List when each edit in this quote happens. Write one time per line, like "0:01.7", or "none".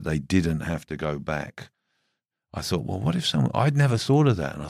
none